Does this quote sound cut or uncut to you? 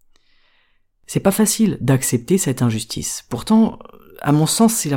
uncut